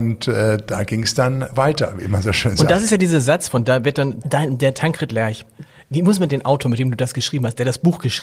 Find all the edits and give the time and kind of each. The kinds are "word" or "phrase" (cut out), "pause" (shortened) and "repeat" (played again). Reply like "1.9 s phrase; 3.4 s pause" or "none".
1.5 s word; 4.2 s word; 6.3 s word

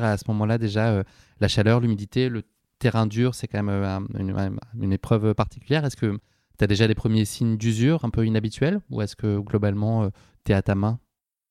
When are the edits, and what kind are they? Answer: none

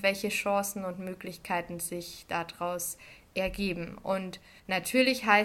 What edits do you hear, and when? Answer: none

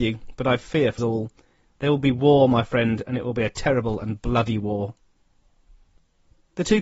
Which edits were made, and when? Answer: 1.0 s word

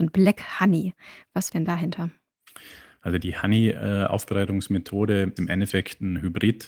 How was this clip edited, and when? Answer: 1.5 s phrase; 5.4 s word

